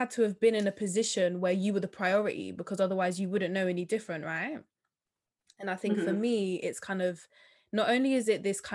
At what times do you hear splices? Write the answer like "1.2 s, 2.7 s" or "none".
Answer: none